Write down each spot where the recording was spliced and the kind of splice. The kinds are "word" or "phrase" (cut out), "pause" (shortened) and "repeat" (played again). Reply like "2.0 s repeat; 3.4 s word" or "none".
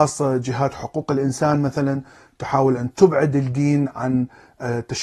none